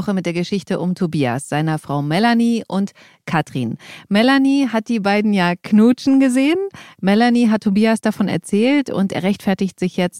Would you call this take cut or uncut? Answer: uncut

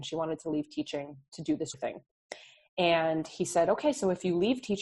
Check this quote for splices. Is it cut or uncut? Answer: cut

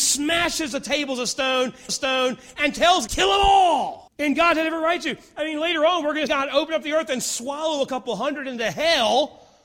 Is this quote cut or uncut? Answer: cut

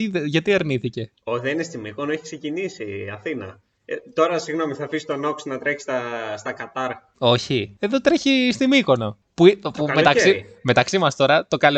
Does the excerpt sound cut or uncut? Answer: uncut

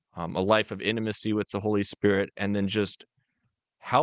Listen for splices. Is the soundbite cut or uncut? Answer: uncut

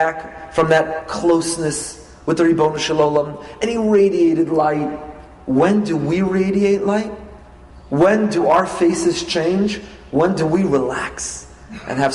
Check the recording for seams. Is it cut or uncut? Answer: uncut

